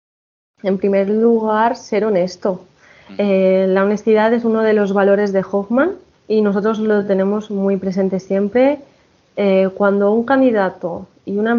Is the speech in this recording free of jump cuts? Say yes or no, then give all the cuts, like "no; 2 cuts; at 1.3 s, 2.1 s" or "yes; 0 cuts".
no; 1 cut; at 6.1 s